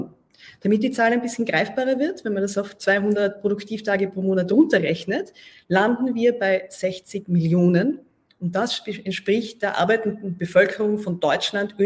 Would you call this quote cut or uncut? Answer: uncut